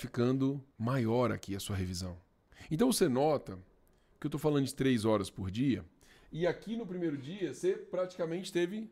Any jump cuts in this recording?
no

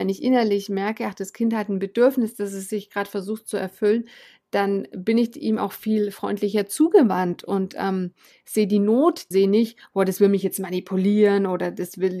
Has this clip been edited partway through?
yes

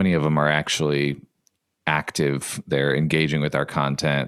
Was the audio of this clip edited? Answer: no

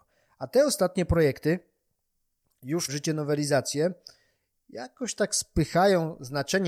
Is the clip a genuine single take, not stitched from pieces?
no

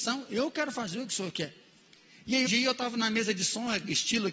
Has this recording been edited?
yes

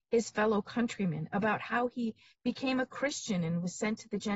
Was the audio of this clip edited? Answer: no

